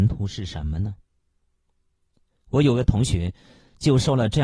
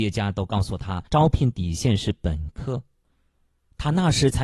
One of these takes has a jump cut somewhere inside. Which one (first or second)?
second